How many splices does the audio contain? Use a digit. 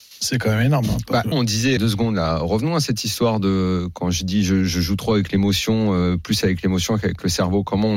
2